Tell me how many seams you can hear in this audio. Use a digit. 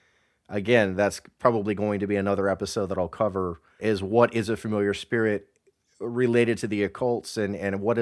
1